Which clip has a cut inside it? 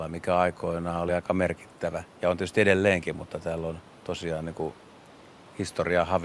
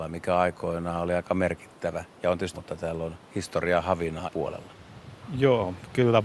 second; 3 cuts; at 2.5 s, 3.3 s, 4.3 s

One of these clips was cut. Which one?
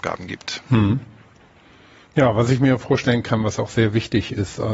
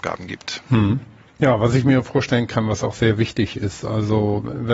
second; 1 cut; at 1.3 s

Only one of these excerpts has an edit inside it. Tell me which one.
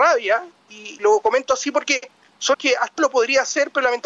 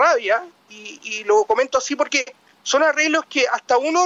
first; 3 cuts; at 1.0 s, 2.5 s, 3.0 s

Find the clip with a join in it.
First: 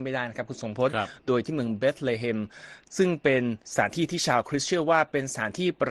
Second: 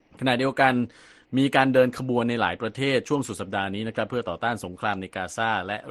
first; 1 cut; at 3.6 s

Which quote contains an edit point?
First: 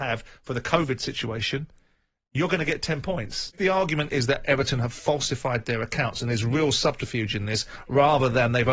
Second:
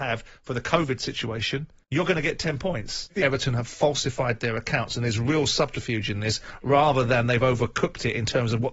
second; 2 cuts; at 1.8 s, 3.2 s

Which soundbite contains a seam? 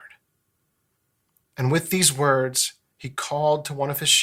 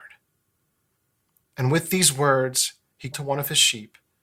second; 1 cut; at 3.1 s

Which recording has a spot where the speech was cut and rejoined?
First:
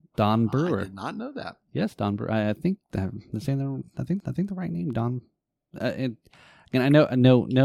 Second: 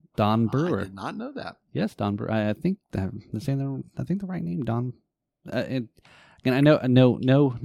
first; 1 cut; at 4.2 s

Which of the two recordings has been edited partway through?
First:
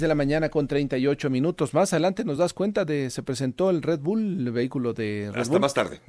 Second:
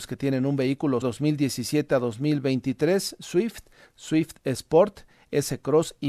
second; 1 cut; at 1.0 s

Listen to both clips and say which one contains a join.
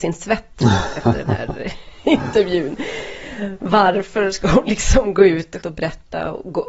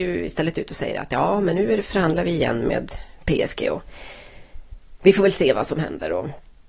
first; 1 cut; at 5.6 s

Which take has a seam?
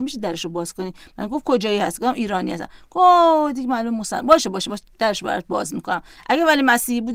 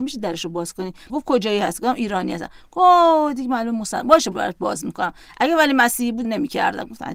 second; 3 cuts; at 1.1 s, 4.3 s, 6.2 s

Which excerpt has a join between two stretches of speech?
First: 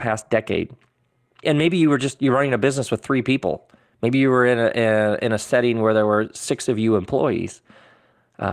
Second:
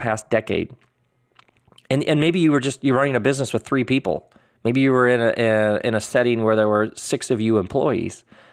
first; 1 cut; at 1.4 s

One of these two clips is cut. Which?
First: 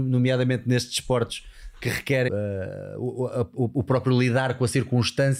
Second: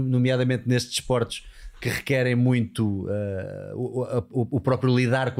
first; 1 cut; at 2.3 s

